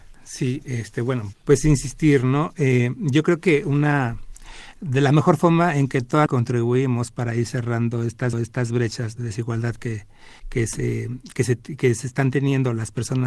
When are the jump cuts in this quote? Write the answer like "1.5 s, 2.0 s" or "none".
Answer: 1.3 s, 6.3 s, 8.3 s, 10.4 s